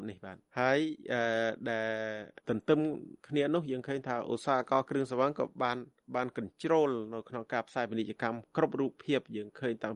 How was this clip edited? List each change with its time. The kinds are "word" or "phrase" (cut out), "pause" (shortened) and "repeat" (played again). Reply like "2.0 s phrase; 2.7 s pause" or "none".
3.2 s pause